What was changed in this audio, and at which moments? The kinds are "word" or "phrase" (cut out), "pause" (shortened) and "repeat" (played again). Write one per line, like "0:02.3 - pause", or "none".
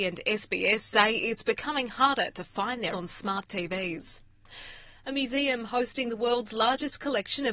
0:02.9 - word